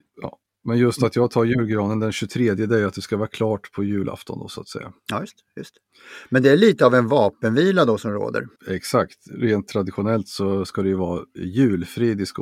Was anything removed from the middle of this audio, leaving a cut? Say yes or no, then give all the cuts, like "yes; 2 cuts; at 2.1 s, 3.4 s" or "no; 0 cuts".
yes; 2 cuts; at 5.0 s, 8.6 s